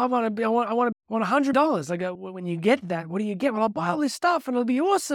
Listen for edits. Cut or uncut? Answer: cut